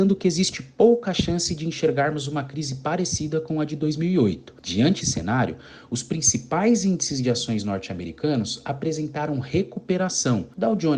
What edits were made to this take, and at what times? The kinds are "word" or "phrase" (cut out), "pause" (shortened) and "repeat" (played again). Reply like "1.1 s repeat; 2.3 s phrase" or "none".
5.0 s word